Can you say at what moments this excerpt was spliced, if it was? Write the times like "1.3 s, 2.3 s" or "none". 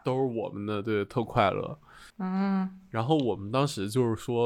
2.1 s